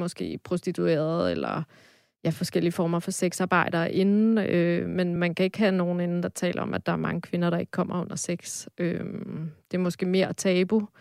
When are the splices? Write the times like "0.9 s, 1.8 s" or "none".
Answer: none